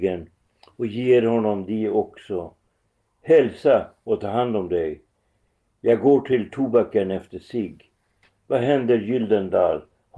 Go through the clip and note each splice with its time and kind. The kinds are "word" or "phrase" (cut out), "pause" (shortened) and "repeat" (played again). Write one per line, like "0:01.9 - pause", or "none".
none